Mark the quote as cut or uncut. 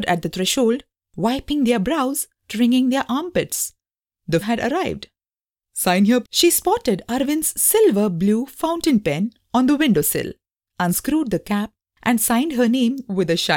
cut